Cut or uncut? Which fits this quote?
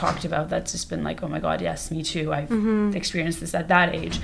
uncut